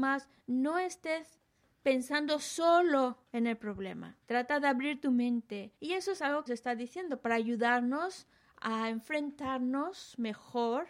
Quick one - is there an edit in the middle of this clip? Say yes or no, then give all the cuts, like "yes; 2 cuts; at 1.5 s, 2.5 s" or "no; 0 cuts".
yes; 3 cuts; at 4.2 s, 5.8 s, 6.5 s